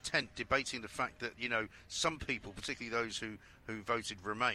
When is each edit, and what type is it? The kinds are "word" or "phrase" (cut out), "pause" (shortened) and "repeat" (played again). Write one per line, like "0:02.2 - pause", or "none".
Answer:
none

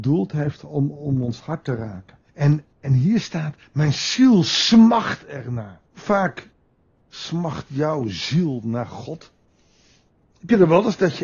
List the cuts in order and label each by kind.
0:02.3 - pause
0:05.9 - pause

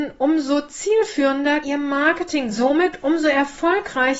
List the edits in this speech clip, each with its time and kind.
0:01.6 - word
0:02.5 - phrase

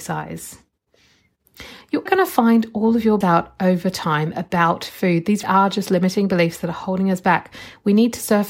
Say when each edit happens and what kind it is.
0:02.1 - word
0:03.2 - word
0:05.4 - word

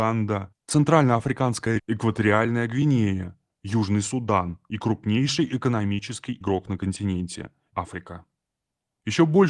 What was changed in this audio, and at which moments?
0:01.8 - word
0:06.4 - word
0:07.7 - word

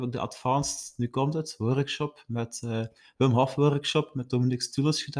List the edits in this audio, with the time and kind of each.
none

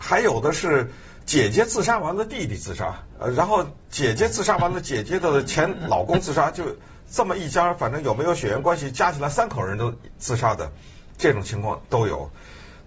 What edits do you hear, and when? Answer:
0:03.1 - word

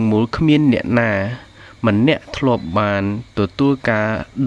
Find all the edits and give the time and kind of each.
none

